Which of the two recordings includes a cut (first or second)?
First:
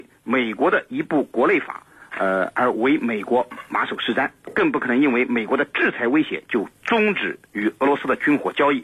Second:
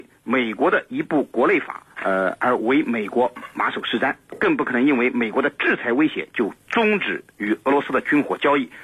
second